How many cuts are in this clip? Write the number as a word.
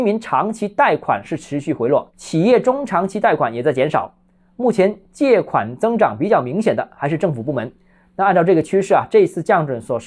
zero